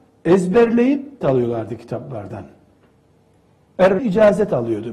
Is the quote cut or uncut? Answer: cut